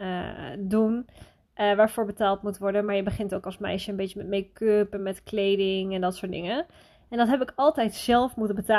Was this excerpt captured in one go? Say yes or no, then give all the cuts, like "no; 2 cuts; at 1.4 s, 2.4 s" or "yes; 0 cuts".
yes; 0 cuts